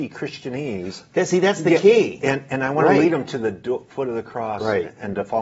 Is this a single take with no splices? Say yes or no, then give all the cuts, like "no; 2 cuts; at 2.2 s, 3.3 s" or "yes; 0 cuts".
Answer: yes; 0 cuts